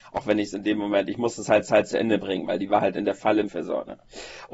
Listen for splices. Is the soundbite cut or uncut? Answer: cut